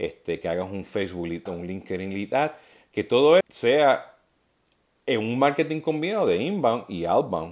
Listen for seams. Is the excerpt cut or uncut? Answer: cut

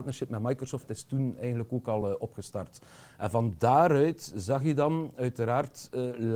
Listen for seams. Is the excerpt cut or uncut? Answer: uncut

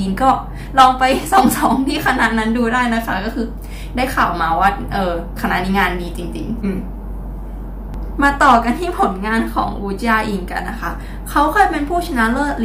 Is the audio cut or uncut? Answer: cut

